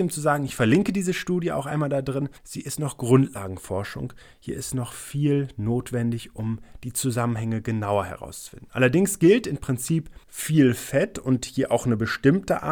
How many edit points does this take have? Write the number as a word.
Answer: two